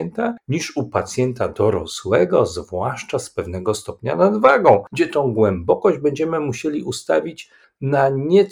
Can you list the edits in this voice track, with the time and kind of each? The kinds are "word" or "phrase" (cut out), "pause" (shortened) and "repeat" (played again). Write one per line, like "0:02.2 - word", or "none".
none